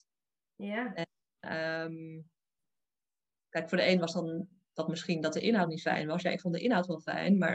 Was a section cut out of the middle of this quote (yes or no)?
no